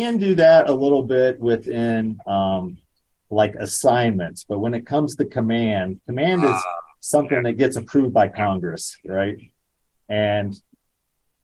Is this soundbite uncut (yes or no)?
yes